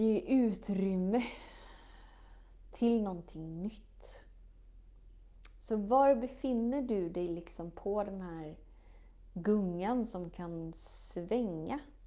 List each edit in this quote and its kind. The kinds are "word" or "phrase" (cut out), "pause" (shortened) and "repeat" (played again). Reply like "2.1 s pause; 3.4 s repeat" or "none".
none

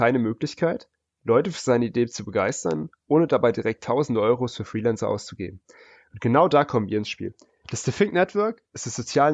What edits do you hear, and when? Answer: none

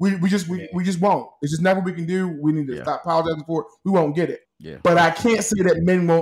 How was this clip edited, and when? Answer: 4.4 s pause

